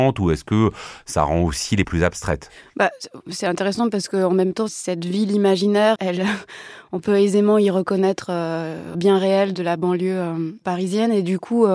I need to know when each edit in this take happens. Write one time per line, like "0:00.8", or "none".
0:01.8
0:04.7
0:06.0
0:08.9

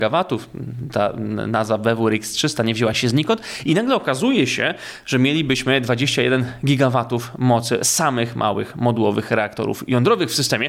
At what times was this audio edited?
none

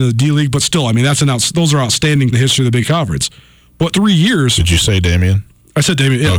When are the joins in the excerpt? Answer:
0:02.3
0:02.8
0:03.9

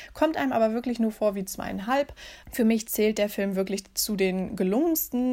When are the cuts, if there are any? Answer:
0:02.4

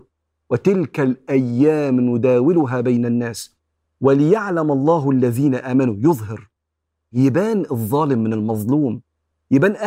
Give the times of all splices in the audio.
none

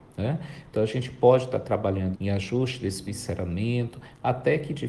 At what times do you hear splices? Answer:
0:02.1
0:03.1

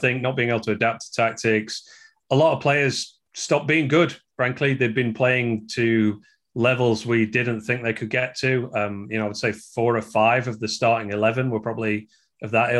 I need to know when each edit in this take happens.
none

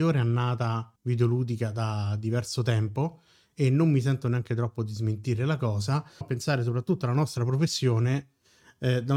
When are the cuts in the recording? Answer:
0:01.0
0:06.2

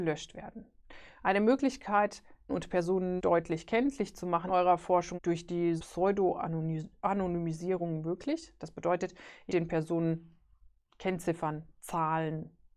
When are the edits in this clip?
0:02.5
0:03.2
0:04.5
0:05.1
0:05.8
0:09.5

